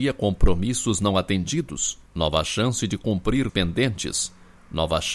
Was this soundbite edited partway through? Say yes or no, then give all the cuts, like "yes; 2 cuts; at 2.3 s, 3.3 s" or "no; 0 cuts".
yes; 2 cuts; at 2.1 s, 3.5 s